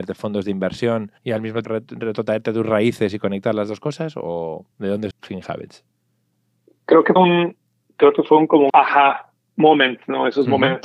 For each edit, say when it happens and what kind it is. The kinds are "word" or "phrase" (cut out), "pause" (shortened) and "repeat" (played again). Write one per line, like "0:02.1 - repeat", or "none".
0:01.2 - pause
0:01.6 - word
0:04.7 - pause
0:05.1 - word
0:07.2 - word
0:08.7 - word

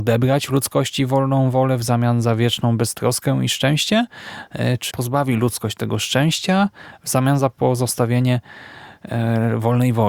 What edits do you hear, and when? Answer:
0:04.9 - word

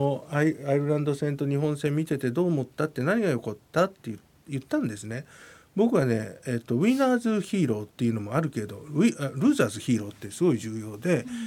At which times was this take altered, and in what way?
0:07.9 - pause

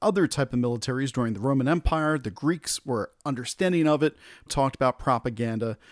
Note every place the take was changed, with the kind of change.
0:04.5 - word

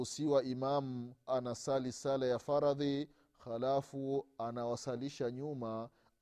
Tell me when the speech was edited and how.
0:01.3 - word

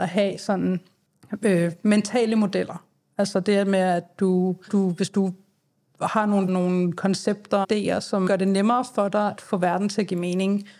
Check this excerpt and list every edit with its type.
0:04.7 - word
0:06.5 - word
0:07.6 - word
0:08.3 - word
0:09.4 - word

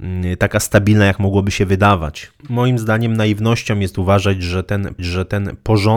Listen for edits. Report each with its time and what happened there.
0:02.4 - pause
0:05.0 - repeat

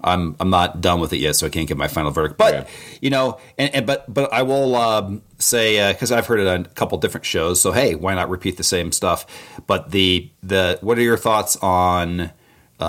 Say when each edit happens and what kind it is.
0:10.3 - pause

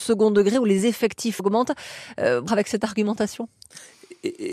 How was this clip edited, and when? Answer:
0:01.4 - word
0:02.5 - phrase

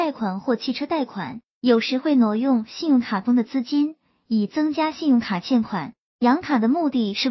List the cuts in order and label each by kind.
none

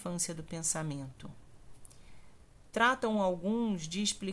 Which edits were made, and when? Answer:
none

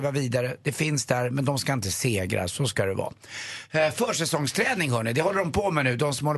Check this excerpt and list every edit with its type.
none

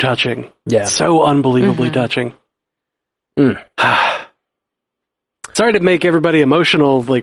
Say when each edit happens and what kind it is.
none

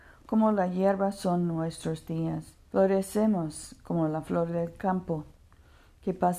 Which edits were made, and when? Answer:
0:02.7 - pause

